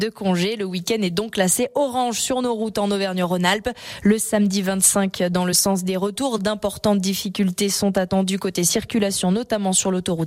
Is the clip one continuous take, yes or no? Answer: yes